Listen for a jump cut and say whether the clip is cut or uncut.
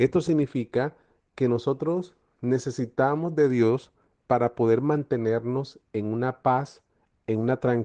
uncut